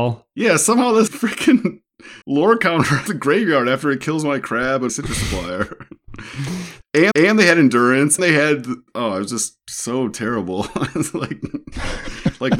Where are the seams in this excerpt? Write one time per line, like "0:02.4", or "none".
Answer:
0:01.1
0:02.2
0:03.1
0:04.9
0:07.1
0:08.2
0:08.9
0:09.6